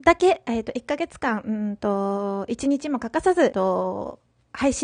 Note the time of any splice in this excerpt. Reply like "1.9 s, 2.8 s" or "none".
3.5 s